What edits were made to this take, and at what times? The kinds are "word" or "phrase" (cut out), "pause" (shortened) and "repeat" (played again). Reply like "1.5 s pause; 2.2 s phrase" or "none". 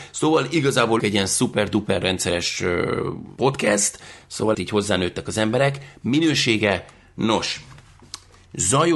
1.0 s word; 2.0 s word; 4.5 s word